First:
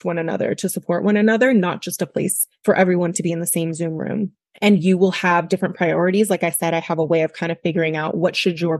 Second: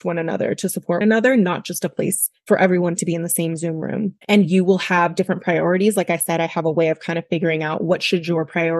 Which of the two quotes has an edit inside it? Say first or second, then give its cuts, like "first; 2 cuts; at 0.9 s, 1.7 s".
second; 2 cuts; at 1.0 s, 4.2 s